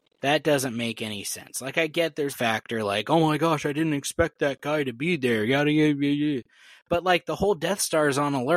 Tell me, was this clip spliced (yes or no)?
yes